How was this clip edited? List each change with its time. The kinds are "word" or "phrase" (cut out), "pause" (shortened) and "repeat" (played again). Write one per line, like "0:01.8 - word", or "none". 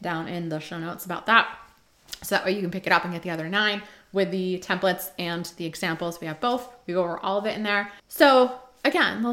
0:08.0 - pause